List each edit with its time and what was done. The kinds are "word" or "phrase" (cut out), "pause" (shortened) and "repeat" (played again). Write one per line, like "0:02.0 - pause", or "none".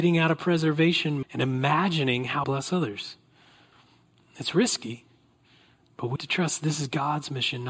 0:01.2 - word
0:02.4 - phrase
0:06.2 - word